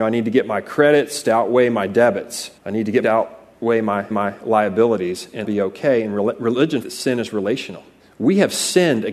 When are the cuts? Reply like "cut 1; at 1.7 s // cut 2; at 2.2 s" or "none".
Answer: cut 1; at 2.6 s // cut 2; at 3.0 s // cut 3; at 4.1 s // cut 4; at 5.4 s // cut 5; at 6.8 s // cut 6; at 8.0 s